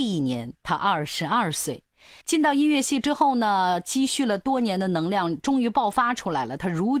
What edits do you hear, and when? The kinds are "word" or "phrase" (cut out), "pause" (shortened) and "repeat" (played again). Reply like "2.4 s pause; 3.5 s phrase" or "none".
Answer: 2.2 s pause